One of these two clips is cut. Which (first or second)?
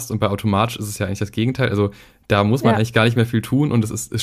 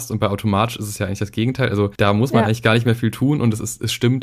second